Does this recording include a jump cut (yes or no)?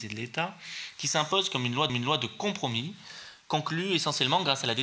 yes